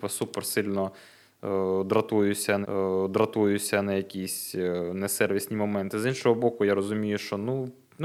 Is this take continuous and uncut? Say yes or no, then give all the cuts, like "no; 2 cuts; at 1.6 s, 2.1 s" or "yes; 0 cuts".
no; 1 cut; at 2.6 s